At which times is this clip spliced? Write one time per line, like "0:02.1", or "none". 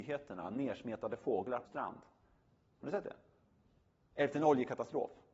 0:01.7